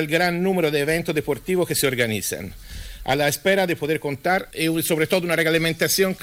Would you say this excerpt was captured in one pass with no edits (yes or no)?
yes